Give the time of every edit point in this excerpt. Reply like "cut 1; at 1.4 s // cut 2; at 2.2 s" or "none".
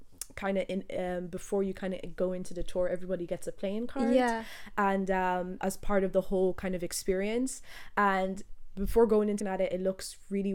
cut 1; at 5.6 s // cut 2; at 9.4 s

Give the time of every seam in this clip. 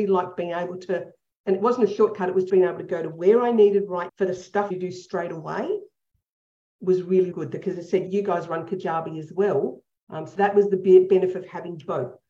cut 1; at 2.5 s // cut 2; at 4.1 s // cut 3; at 4.7 s // cut 4; at 7.3 s // cut 5; at 8.1 s // cut 6; at 10.4 s

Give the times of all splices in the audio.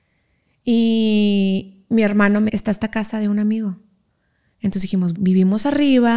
cut 1; at 2.5 s // cut 2; at 5.1 s

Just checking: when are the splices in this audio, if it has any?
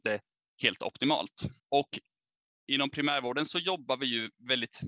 none

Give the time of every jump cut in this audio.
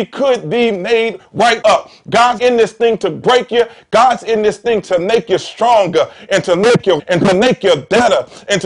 cut 1; at 1.6 s // cut 2; at 2.4 s // cut 3; at 7.0 s

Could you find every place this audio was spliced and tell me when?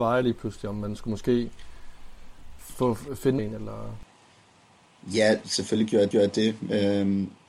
cut 1; at 2.6 s // cut 2; at 3.4 s // cut 3; at 5.4 s // cut 4; at 6.1 s

